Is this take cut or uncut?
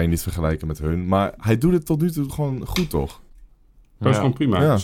uncut